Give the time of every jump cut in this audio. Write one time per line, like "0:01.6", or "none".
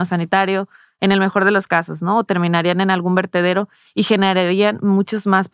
none